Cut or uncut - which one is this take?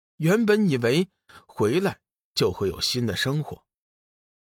uncut